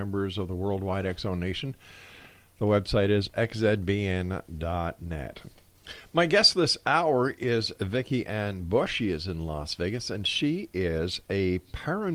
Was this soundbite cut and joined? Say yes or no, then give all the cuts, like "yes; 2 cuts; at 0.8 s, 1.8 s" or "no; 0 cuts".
no; 0 cuts